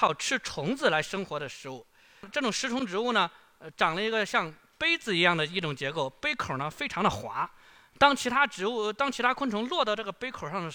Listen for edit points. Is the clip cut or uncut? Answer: uncut